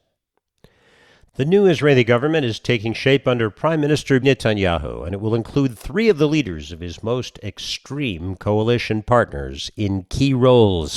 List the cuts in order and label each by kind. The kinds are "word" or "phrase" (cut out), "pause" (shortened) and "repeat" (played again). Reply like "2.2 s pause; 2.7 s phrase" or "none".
4.2 s word